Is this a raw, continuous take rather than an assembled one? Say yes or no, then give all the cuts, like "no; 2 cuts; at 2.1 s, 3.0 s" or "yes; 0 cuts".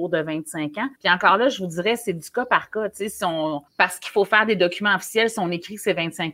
no; 2 cuts; at 0.9 s, 3.7 s